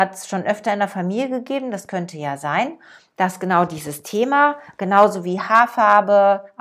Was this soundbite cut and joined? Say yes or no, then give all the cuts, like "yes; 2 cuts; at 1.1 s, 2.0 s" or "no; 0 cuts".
no; 0 cuts